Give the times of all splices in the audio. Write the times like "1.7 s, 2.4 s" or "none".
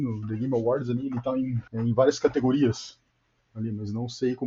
1.7 s